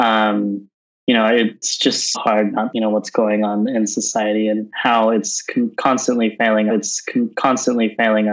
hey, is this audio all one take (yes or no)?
no